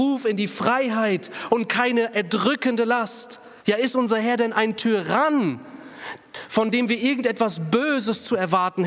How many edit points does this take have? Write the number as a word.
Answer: one